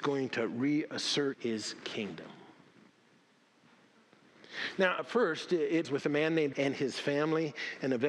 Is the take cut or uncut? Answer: cut